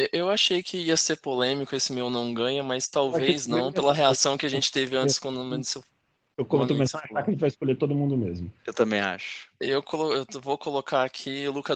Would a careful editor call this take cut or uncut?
cut